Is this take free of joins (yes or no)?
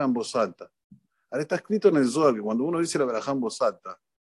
yes